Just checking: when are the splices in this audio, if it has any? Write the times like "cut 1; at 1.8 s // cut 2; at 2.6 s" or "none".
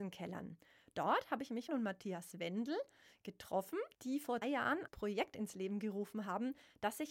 cut 1; at 1.7 s // cut 2; at 3.9 s // cut 3; at 4.4 s // cut 4; at 4.9 s